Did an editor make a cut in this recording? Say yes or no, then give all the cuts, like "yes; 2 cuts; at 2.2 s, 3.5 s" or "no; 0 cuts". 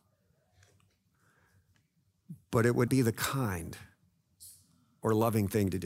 yes; 1 cut; at 2.9 s